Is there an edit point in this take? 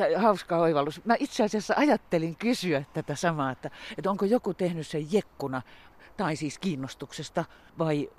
no; 0 cuts

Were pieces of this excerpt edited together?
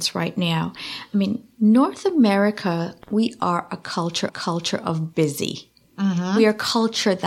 yes; 2 cuts; at 3.0 s, 4.3 s

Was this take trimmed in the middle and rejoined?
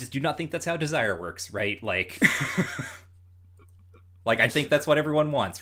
yes; 1 cut; at 4.5 s

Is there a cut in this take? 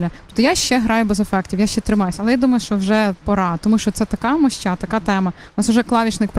no; 0 cuts

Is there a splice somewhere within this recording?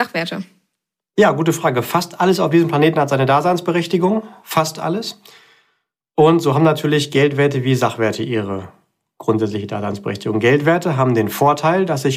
no; 0 cuts

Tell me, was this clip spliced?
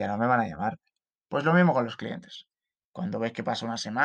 no; 0 cuts

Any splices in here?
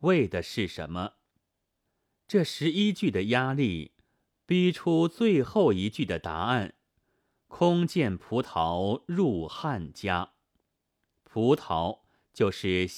no; 0 cuts

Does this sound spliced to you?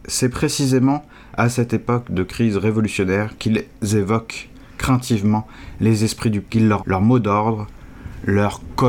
yes; 2 cuts; at 6.4 s, 6.8 s

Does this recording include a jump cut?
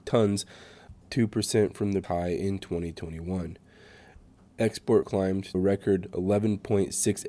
yes; 4 cuts; at 1.0 s, 2.0 s, 5.0 s, 5.5 s

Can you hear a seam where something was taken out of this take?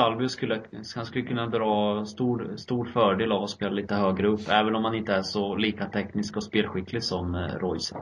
no; 0 cuts

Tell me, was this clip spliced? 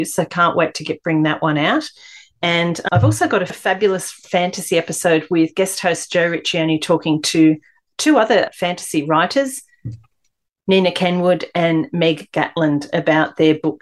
no; 0 cuts

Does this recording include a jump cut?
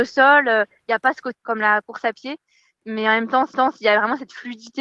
yes; 2 cuts; at 1.3 s, 3.5 s

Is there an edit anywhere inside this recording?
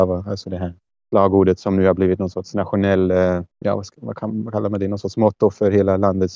no; 0 cuts

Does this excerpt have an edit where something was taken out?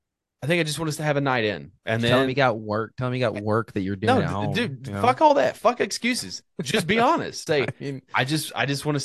yes; 2 cuts; at 1.8 s, 7.5 s

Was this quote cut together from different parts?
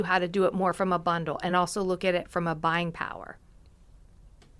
no; 0 cuts

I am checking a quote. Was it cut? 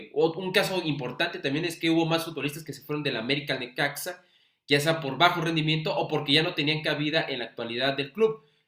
no; 0 cuts

